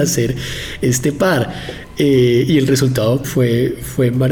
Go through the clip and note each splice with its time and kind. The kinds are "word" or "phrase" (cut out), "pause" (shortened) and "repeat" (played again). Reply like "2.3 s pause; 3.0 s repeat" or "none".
3.2 s word

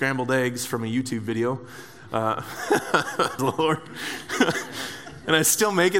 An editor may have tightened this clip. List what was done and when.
3.4 s word

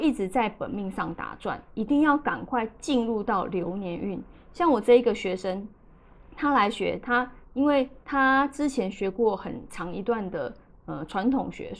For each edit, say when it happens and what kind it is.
8.0 s pause

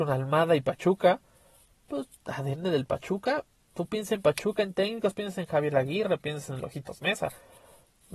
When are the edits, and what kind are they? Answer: 2.1 s pause

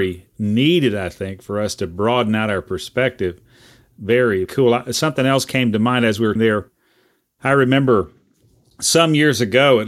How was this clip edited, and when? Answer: 4.4 s word; 6.4 s word

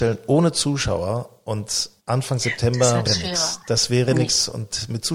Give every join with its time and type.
2.0 s pause; 3.1 s phrase

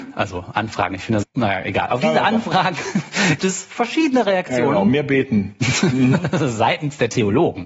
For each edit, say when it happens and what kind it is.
1.2 s word; 3.4 s word

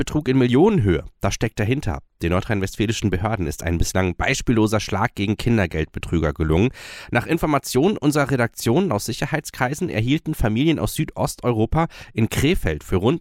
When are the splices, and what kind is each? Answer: none

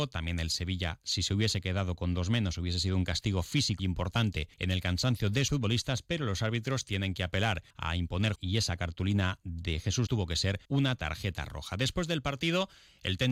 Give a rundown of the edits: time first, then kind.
3.8 s word; 4.5 s pause; 5.5 s word; 7.7 s pause; 8.4 s word; 10.1 s word; 10.6 s pause

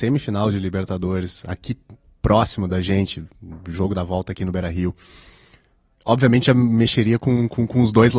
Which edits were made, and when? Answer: none

